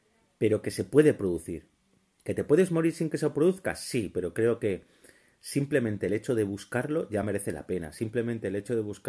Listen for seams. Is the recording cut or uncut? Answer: uncut